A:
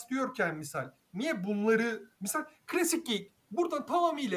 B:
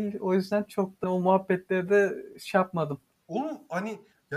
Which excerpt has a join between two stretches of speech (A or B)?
B